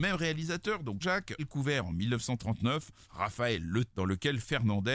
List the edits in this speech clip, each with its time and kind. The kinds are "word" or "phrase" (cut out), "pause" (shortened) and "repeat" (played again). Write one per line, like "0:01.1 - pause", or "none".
0:01.0 - word
0:01.4 - word
0:03.0 - word
0:03.9 - word

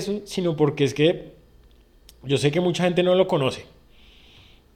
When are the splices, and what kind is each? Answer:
none

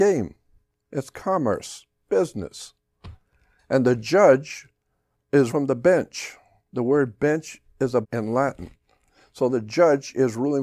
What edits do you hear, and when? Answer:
0:02.0 - word
0:05.5 - word
0:08.0 - word
0:09.5 - word

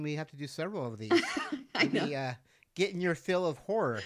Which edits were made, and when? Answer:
none

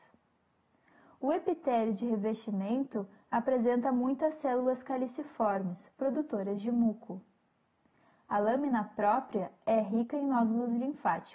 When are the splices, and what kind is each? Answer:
none

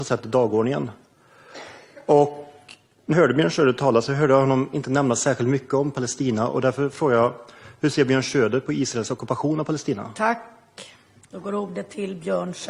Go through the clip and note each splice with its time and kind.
0:03.1 - word

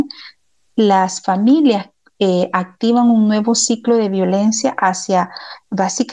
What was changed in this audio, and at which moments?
none

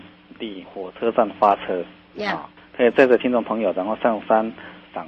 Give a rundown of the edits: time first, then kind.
none

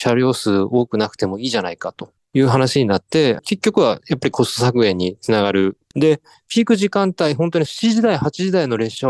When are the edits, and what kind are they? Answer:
0:05.8 - pause

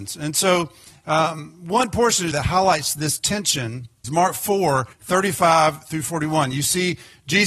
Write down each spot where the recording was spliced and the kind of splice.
0:02.3 - word
0:04.0 - word
0:04.9 - pause

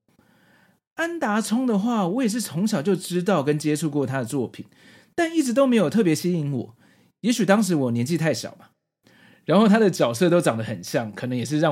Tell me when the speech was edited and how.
none

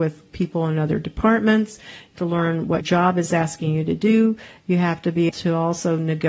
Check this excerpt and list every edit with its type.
0:02.2 - word
0:02.8 - word
0:05.3 - word

